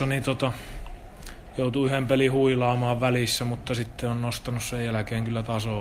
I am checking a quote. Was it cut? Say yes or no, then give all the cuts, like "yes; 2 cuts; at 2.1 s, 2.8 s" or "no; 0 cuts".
no; 0 cuts